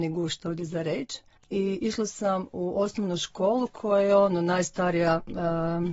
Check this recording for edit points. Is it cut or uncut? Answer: cut